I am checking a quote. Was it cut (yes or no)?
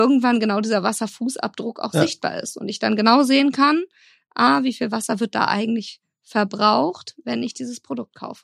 no